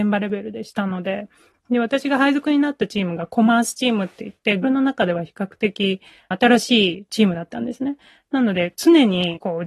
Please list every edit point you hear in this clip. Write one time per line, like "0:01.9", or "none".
0:04.6